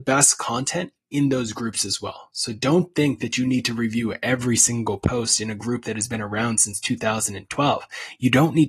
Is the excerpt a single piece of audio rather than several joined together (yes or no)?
yes